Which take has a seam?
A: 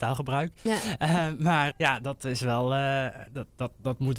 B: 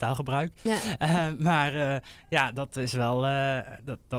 A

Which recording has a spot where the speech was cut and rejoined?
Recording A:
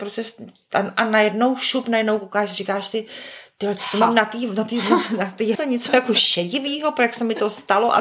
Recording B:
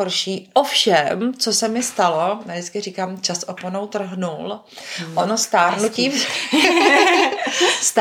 A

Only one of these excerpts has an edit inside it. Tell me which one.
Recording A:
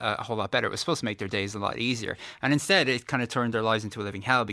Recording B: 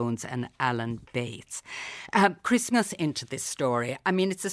B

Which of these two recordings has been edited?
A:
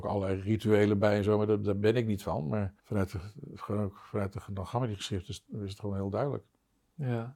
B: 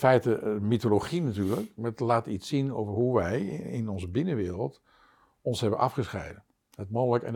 A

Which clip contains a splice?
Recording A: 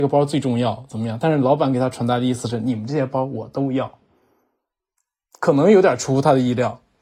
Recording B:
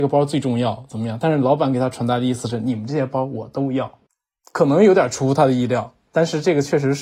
B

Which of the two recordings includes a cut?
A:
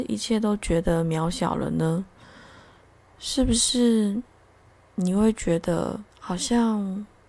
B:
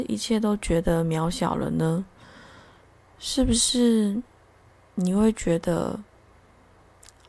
A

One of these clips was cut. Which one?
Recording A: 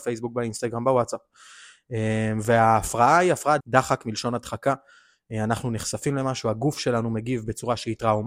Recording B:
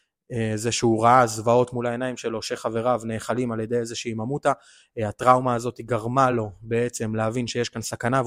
A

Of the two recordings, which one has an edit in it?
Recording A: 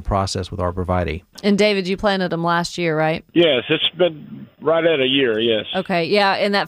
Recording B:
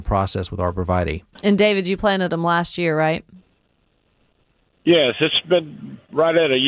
A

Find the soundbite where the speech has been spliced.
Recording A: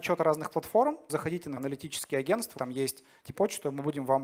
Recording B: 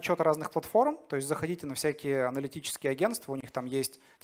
A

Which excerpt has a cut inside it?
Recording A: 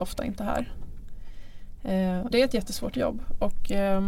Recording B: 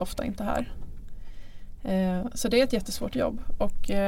A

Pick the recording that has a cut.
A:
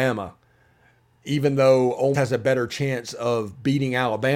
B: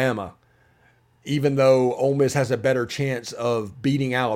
A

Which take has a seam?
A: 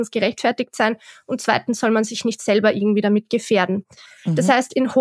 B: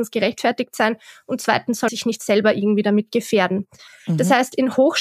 B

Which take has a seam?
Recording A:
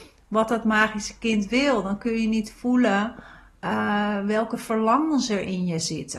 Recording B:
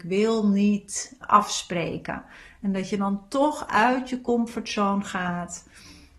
B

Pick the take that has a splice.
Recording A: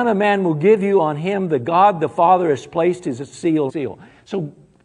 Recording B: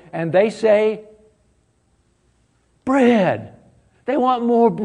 A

